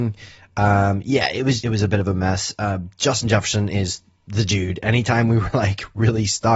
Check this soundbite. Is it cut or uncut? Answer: cut